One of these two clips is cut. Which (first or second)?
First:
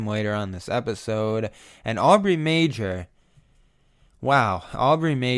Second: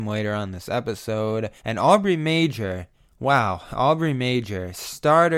second